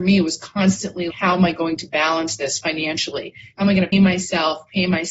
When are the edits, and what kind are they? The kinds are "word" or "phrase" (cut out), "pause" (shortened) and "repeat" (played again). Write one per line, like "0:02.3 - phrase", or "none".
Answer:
0:01.1 - word
0:03.9 - word